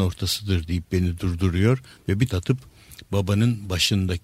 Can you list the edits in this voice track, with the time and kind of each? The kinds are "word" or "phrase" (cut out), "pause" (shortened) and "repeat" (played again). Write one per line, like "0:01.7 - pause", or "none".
0:02.3 - word

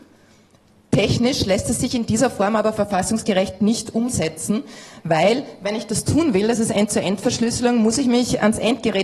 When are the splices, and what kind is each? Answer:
none

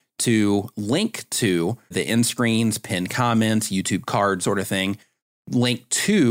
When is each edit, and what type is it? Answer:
0:01.9 - word
0:04.4 - word

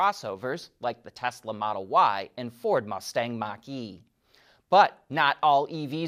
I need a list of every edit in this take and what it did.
none

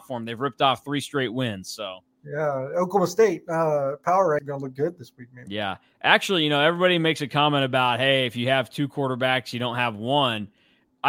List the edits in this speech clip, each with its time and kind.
0:04.4 - word

